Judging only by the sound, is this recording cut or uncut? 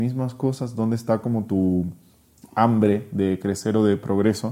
uncut